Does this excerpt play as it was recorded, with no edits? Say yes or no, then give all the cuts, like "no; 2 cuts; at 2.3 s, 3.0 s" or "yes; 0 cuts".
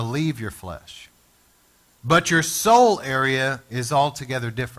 no; 1 cut; at 1.3 s